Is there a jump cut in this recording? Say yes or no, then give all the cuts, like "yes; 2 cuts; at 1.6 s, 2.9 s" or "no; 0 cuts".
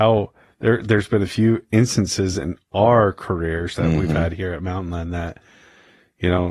no; 0 cuts